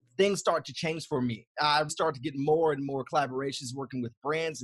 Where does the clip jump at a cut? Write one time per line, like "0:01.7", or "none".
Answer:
0:01.9